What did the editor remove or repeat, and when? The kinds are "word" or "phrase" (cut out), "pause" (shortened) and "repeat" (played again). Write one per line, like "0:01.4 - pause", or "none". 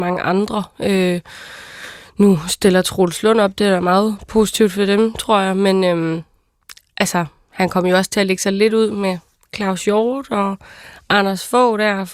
none